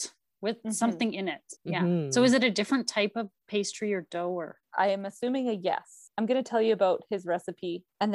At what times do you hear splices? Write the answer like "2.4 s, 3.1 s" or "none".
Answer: 1.6 s